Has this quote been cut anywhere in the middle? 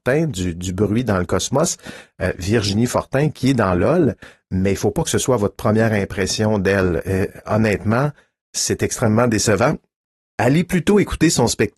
no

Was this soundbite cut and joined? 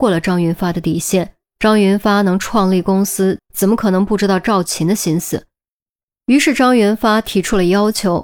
yes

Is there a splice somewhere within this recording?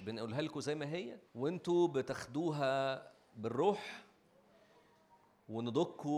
yes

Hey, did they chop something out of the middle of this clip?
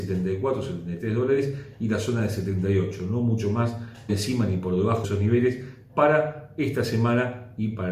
yes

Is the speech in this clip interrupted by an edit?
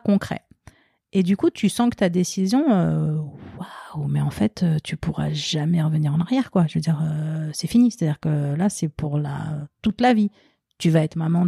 no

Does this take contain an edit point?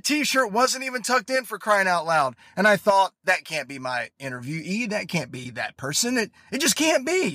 no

